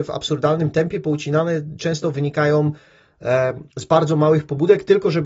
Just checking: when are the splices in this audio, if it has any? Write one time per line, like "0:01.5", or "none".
0:03.7